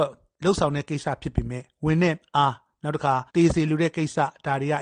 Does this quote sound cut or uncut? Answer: cut